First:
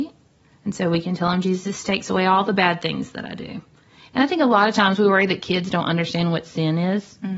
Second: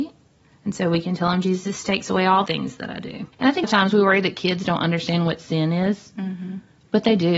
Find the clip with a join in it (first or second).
second